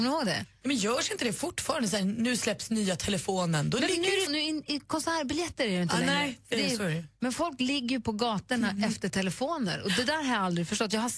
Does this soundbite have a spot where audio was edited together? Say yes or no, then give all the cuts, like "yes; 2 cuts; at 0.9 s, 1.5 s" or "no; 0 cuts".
yes; 1 cut; at 4.3 s